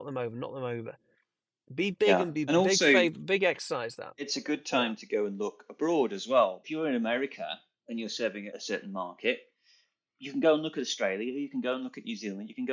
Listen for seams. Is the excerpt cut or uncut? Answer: cut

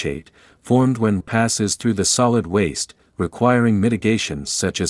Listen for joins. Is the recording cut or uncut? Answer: cut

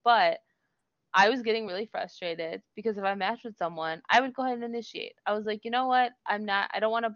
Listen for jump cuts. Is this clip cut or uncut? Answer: uncut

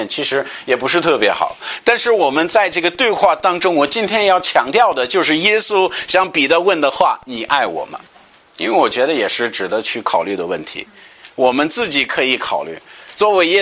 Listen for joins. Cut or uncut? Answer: cut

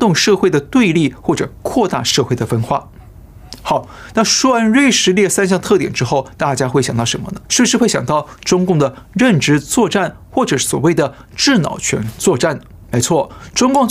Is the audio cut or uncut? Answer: cut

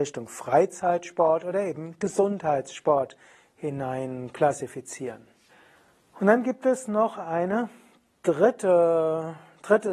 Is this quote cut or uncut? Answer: cut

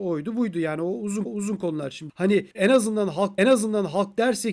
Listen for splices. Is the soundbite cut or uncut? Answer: cut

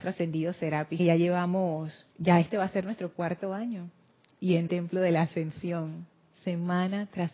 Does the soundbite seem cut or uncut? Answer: cut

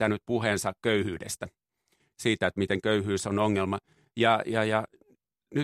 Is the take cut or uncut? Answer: uncut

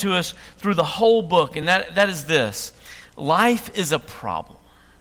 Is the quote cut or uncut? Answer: uncut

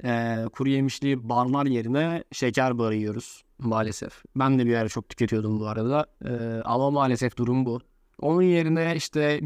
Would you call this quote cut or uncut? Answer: cut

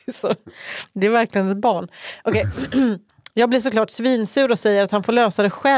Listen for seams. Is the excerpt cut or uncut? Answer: uncut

